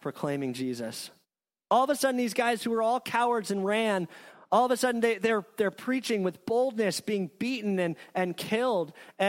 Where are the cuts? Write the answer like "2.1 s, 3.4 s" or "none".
none